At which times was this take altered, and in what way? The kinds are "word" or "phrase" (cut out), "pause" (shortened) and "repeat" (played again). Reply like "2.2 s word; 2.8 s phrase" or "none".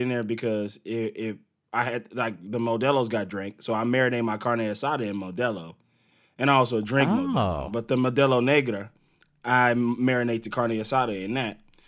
none